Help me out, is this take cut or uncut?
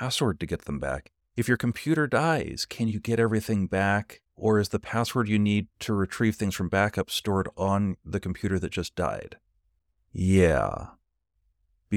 cut